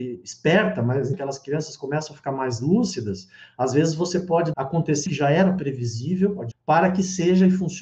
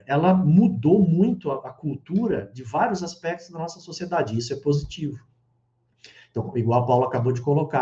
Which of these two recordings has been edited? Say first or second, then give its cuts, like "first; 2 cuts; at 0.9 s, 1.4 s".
first; 4 cuts; at 1.1 s, 4.5 s, 5.1 s, 6.5 s